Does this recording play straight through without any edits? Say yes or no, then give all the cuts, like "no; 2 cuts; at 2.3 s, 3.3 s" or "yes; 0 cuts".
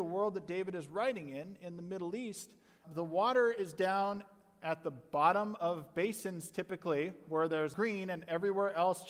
no; 2 cuts; at 2.8 s, 7.7 s